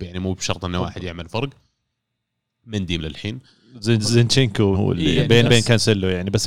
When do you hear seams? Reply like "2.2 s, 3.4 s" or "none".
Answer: 3.0 s, 4.7 s, 5.4 s